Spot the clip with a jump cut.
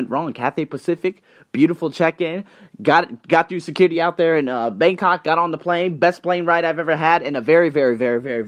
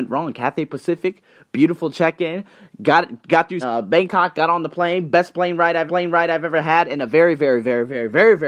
second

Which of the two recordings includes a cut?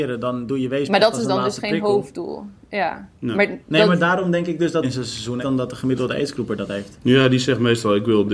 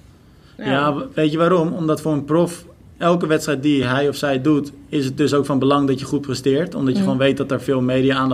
first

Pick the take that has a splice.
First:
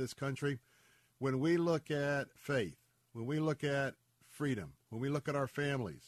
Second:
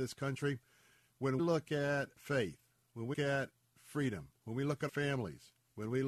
second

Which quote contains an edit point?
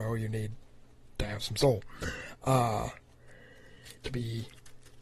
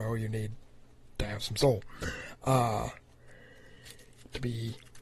first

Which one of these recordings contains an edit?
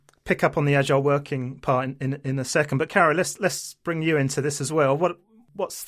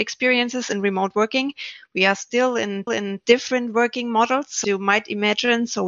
second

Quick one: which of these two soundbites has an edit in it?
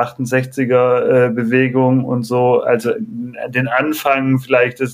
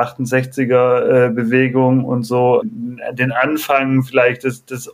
second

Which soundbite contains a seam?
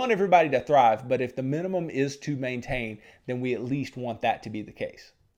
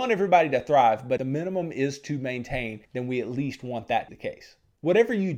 second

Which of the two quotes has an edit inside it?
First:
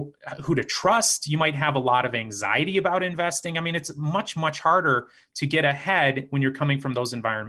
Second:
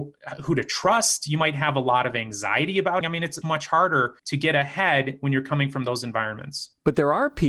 second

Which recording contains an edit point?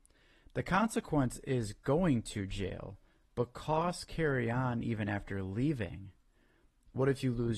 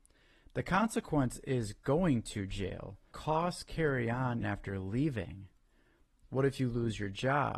second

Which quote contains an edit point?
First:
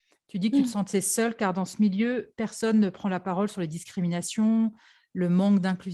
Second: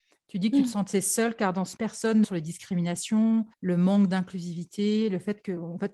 second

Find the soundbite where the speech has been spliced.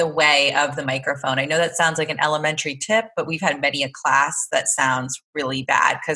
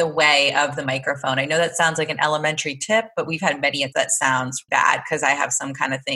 second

